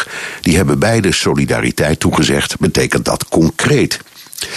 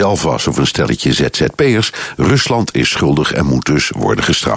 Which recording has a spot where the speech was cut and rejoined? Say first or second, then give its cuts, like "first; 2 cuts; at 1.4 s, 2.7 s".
first; 1 cut; at 2.6 s